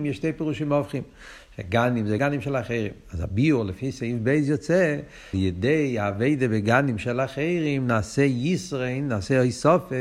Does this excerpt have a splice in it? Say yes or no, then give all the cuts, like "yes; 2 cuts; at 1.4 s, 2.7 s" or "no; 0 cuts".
yes; 2 cuts; at 2.2 s, 5.3 s